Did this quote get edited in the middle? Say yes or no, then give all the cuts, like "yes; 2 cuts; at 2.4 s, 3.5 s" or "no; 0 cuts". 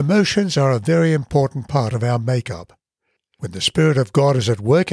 no; 0 cuts